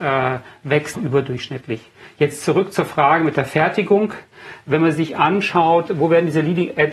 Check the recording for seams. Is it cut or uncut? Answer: cut